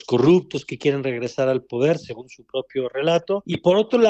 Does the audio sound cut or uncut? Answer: uncut